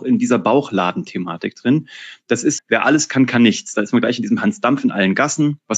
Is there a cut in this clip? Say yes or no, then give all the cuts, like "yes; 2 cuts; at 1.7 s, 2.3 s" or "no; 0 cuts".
yes; 1 cut; at 2.6 s